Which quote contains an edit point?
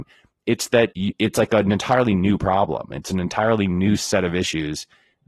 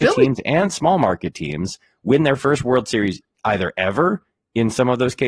first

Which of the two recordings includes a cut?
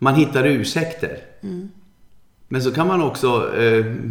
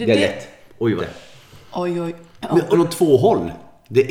second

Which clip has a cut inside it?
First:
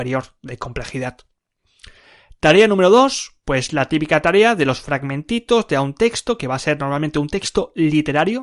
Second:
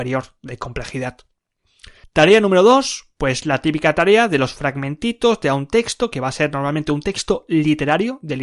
second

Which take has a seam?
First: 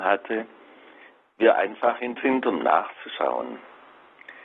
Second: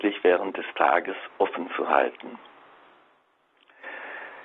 first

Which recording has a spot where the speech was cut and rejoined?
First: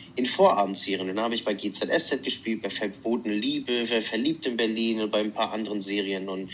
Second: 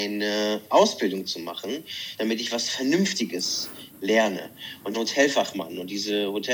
second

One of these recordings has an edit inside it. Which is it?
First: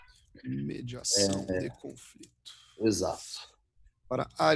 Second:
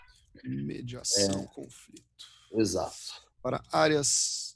second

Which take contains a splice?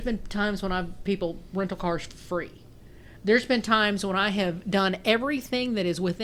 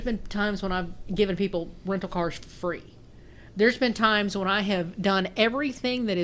first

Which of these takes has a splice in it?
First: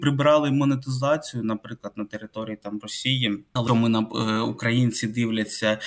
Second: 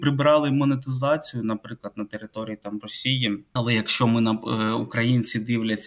first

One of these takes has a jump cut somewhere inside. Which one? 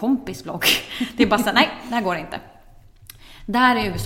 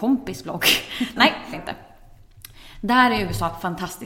second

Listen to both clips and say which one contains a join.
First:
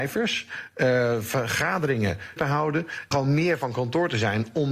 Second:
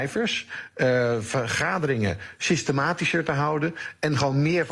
first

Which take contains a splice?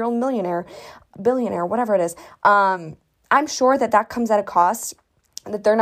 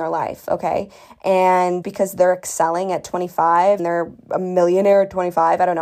second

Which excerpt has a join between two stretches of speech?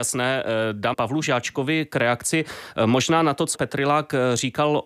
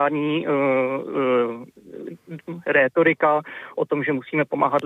first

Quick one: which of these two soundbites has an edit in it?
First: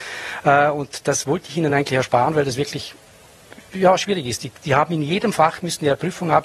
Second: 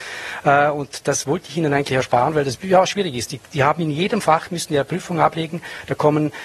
second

